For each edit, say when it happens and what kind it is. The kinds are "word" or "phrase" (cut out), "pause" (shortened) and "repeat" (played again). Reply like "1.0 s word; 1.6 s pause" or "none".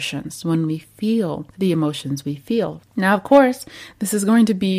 2.9 s pause